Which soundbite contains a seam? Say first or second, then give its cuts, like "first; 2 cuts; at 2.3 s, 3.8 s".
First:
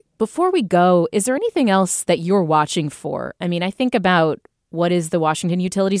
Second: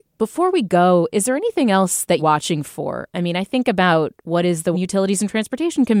second; 3 cuts; at 2.2 s, 4.2 s, 4.7 s